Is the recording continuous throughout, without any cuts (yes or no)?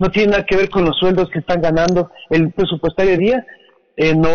no